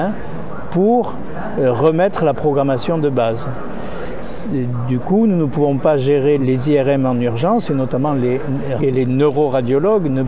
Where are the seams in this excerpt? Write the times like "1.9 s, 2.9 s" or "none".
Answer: 6.4 s, 8.8 s